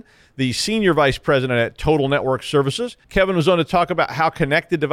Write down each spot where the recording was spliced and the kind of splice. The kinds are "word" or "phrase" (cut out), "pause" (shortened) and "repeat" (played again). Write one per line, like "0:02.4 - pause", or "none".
0:03.0 - pause